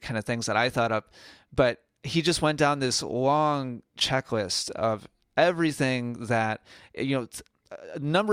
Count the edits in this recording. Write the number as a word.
zero